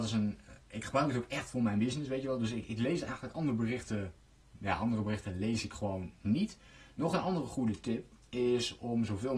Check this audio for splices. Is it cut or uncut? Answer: uncut